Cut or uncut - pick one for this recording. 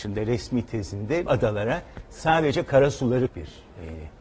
cut